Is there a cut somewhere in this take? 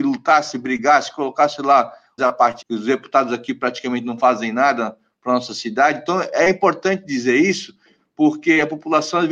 yes; 2 cuts; at 2.2 s, 2.6 s

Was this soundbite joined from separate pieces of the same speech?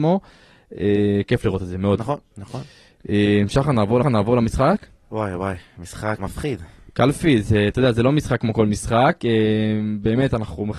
yes; 2 cuts; at 4.0 s, 6.2 s

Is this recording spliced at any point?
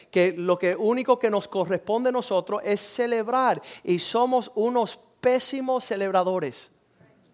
no; 0 cuts

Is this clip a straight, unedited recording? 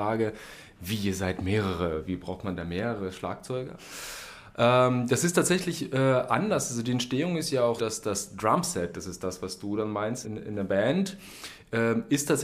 no; 2 cuts; at 7.8 s, 10.2 s

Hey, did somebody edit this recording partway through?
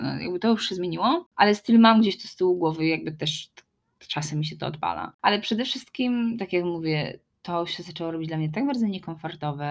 no; 0 cuts

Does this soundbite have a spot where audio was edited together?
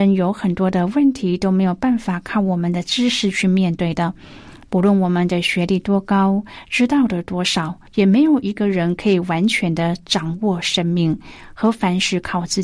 yes; 1 cut; at 7.9 s

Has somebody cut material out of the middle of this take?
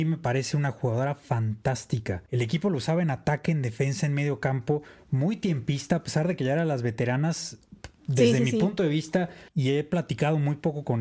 yes; 2 cuts; at 2.3 s, 9.5 s

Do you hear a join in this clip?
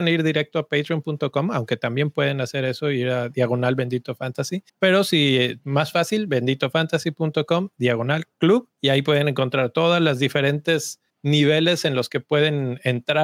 yes; 3 cuts; at 4.7 s, 8.7 s, 11.1 s

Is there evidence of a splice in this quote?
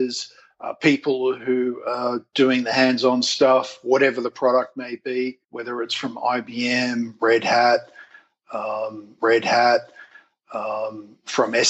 yes; 2 cuts; at 5.4 s, 9.2 s

